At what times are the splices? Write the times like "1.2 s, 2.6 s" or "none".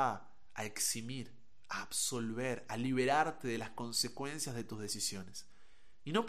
none

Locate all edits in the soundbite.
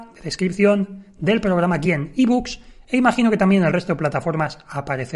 none

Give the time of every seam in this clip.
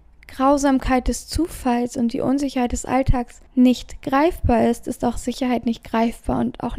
3.5 s

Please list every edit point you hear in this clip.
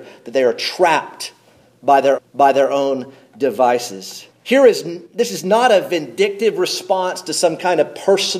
2.2 s, 4.3 s, 5.1 s

